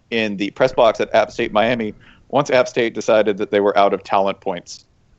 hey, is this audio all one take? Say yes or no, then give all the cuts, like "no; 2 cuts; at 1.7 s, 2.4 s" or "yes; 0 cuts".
yes; 0 cuts